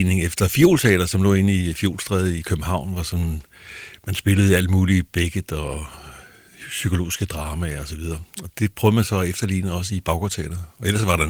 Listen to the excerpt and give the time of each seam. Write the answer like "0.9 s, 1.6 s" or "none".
none